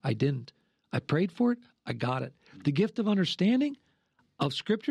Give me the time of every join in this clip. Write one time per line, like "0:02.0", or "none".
none